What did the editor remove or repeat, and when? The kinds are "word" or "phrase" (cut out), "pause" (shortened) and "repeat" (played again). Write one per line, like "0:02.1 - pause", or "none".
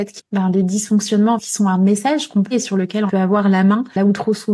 0:02.5 - word
0:03.1 - word